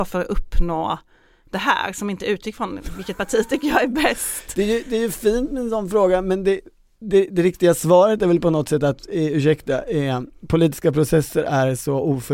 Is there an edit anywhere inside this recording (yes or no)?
no